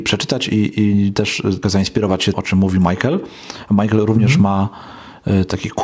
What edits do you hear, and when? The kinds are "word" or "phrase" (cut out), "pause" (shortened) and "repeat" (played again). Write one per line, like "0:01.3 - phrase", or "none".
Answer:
0:01.6 - word
0:02.3 - word